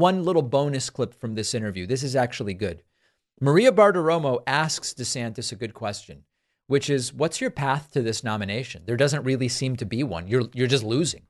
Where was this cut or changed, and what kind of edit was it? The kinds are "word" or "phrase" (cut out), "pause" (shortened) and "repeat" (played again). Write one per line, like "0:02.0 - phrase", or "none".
none